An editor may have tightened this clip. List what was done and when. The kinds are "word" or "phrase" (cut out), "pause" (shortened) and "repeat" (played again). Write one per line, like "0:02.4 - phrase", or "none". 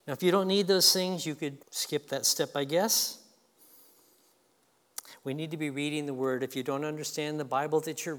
0:01.6 - pause